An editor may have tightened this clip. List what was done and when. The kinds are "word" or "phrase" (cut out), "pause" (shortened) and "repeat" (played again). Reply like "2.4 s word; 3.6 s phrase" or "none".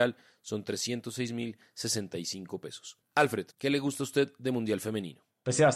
3.5 s pause